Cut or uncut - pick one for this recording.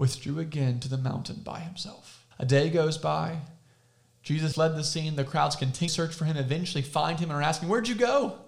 cut